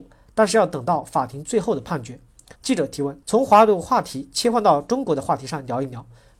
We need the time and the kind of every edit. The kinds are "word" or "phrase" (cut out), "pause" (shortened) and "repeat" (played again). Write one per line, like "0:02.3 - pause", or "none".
0:02.6 - pause
0:03.2 - pause